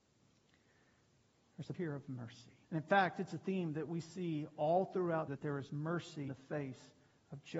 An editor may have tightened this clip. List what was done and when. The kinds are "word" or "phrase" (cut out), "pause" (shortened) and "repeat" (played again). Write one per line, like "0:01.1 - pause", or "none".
0:01.7 - word
0:02.6 - pause
0:05.3 - word
0:06.3 - word